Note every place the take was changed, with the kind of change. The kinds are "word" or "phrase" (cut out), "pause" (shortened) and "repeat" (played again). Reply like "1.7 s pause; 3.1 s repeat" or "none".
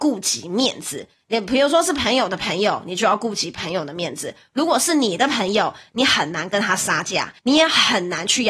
7.4 s pause